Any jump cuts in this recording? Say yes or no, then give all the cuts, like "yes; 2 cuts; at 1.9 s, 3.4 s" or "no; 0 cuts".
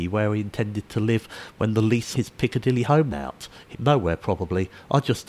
yes; 3 cuts; at 2.1 s, 3.1 s, 3.7 s